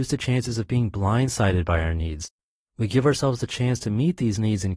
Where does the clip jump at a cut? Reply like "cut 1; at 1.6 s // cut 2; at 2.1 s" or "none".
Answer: none